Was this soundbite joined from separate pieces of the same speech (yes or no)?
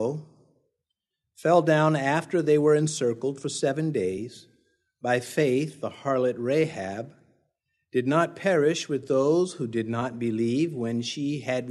no